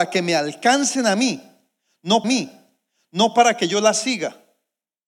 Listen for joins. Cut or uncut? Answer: cut